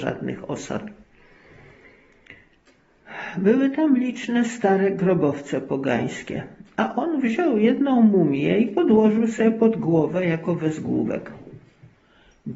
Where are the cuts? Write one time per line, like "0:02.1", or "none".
none